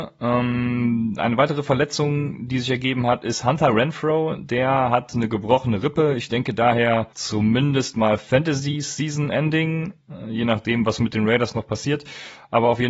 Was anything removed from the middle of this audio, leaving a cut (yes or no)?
yes